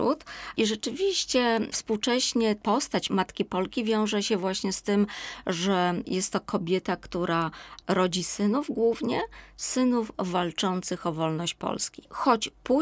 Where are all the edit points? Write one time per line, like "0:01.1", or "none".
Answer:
none